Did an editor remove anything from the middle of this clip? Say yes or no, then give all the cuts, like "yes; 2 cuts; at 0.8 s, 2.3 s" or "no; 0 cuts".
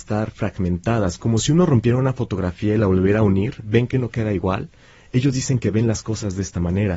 no; 0 cuts